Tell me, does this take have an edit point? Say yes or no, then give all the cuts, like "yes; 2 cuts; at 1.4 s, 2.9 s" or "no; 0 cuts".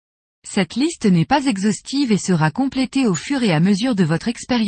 no; 0 cuts